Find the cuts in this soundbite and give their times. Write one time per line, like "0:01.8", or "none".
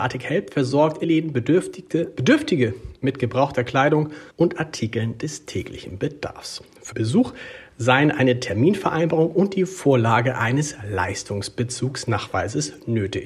0:01.0
0:04.3
0:06.9